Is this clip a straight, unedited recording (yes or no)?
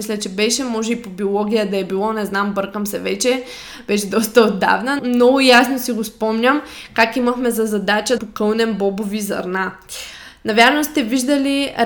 no